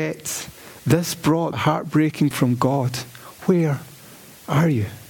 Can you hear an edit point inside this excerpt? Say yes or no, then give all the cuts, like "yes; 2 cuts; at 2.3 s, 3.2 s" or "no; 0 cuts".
yes; 2 cuts; at 1.5 s, 2.3 s